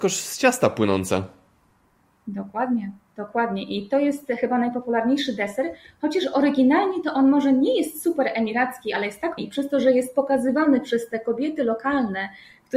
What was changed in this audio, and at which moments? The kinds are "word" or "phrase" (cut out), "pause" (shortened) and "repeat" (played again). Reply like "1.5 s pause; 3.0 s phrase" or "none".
9.4 s word